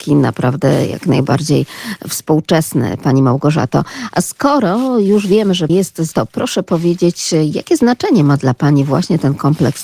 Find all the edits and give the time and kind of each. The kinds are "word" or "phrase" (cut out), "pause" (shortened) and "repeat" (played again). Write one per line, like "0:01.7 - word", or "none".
0:05.7 - word
0:06.1 - word